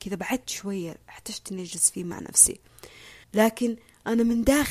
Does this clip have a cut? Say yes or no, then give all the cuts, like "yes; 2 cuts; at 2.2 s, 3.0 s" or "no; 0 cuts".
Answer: yes; 1 cut; at 3.2 s